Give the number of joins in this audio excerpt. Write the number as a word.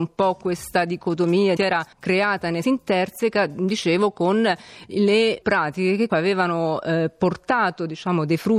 five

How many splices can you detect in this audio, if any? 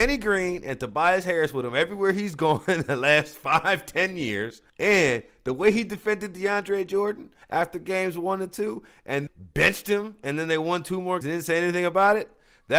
four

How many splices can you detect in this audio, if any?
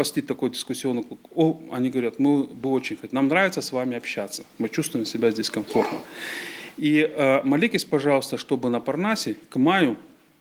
zero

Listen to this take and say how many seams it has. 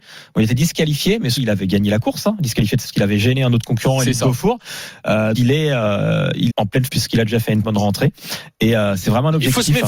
six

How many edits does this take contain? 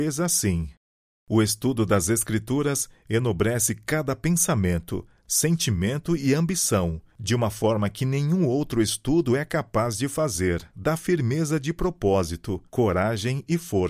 three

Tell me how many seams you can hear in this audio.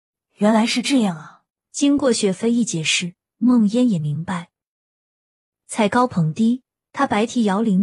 one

